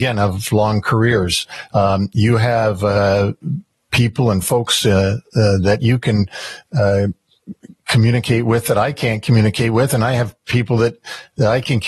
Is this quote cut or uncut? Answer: uncut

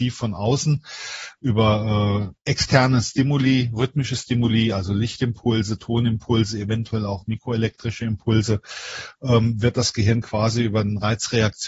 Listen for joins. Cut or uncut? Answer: cut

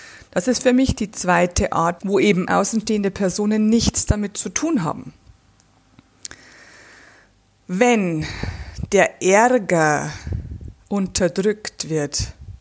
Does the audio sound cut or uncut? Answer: cut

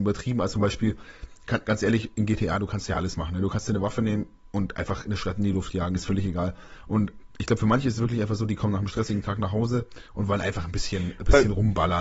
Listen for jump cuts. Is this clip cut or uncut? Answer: uncut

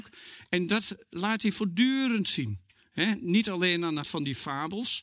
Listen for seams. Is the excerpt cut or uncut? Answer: cut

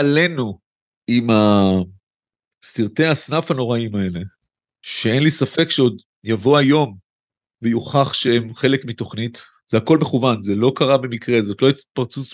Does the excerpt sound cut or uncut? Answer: uncut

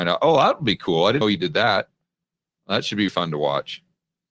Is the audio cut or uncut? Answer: cut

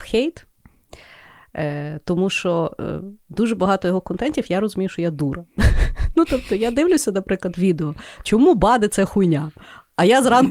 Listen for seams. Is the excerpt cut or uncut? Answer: uncut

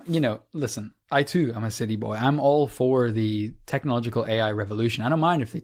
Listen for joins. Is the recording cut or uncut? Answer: cut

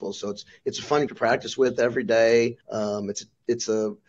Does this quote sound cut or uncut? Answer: cut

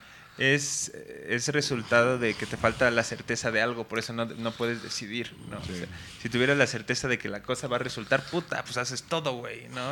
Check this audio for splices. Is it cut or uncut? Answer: uncut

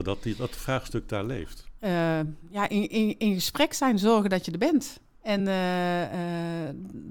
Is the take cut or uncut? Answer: uncut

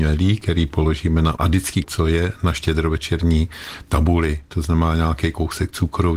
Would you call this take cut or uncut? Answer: cut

